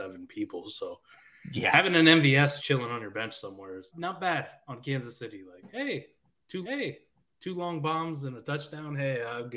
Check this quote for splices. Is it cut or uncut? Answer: cut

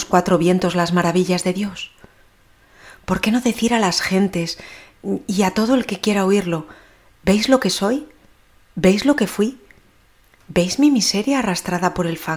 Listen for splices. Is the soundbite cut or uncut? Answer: uncut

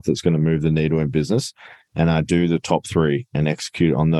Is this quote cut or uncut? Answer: uncut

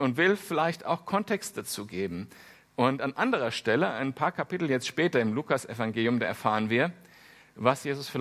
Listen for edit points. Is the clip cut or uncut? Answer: uncut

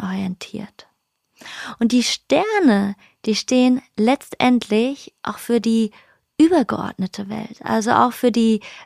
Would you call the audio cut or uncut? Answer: uncut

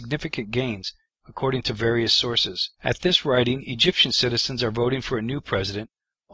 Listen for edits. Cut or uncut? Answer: cut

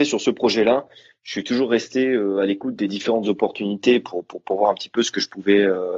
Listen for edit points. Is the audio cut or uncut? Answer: uncut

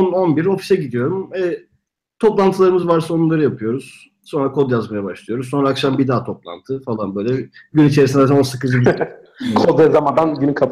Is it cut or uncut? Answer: uncut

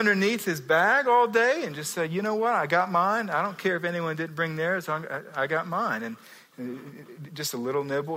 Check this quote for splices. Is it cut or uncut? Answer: uncut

